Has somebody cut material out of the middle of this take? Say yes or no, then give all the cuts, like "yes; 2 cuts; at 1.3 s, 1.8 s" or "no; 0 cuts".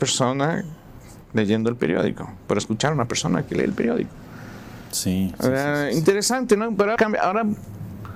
yes; 1 cut; at 7.0 s